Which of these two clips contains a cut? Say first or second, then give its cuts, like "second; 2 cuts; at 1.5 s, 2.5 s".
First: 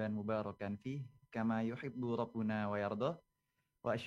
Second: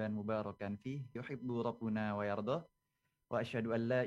second; 1 cut; at 1.2 s